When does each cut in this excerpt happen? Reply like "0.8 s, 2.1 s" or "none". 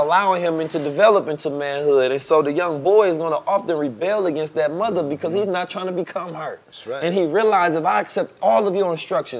6.6 s